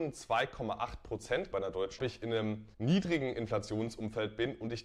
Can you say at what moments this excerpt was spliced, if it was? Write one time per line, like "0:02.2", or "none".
0:01.5
0:02.0
0:02.7